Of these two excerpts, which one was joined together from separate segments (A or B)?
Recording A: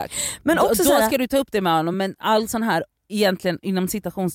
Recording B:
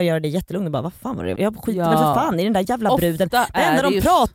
B